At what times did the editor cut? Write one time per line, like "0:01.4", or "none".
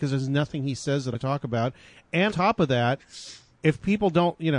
0:01.1
0:02.3